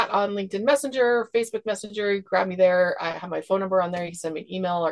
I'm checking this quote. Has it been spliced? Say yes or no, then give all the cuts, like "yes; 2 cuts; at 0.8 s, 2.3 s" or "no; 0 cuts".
no; 0 cuts